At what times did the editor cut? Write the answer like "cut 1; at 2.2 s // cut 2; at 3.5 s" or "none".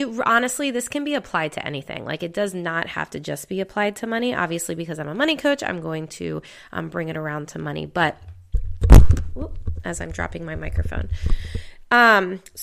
none